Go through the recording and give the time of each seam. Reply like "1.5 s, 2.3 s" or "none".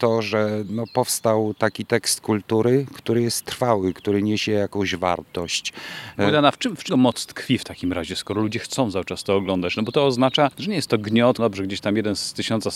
6.9 s, 10.5 s, 11.4 s